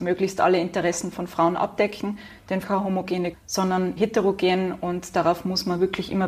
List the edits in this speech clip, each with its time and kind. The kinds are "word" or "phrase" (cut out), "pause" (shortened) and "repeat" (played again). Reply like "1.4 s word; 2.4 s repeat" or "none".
2.6 s phrase; 3.3 s word; 4.0 s word